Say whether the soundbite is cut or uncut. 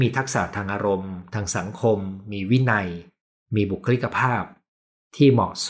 uncut